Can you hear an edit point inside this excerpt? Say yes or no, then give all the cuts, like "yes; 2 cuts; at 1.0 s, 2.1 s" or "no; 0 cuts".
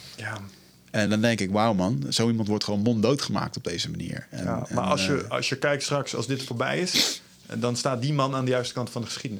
yes; 1 cut; at 1.1 s